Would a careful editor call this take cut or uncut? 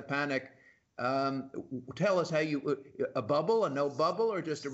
uncut